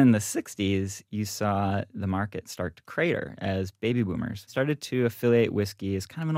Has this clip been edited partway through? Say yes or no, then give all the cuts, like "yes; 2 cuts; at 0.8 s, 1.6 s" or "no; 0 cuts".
no; 0 cuts